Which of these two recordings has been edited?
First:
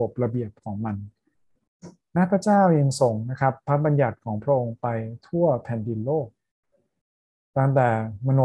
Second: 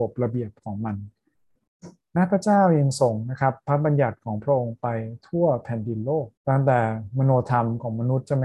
second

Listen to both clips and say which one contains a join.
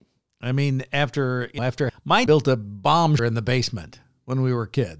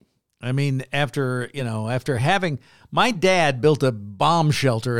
first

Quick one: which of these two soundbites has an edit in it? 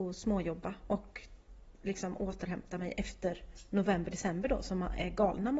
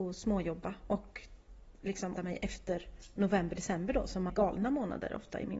second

